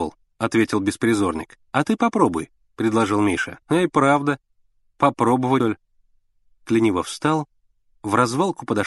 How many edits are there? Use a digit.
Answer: 4